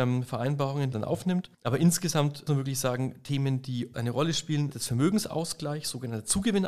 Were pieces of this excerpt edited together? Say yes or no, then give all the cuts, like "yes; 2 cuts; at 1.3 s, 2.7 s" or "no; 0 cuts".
yes; 5 cuts; at 0.9 s, 1.5 s, 2.5 s, 3.9 s, 4.7 s